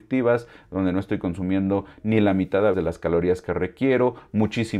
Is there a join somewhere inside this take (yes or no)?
yes